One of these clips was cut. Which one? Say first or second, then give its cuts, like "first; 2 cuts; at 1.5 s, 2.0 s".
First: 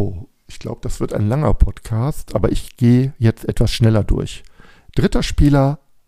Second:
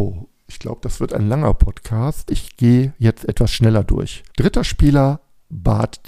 second; 2 cuts; at 2.3 s, 4.3 s